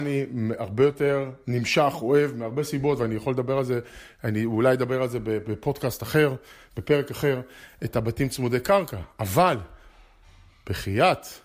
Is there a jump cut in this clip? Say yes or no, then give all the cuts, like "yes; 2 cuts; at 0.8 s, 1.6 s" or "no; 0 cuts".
no; 0 cuts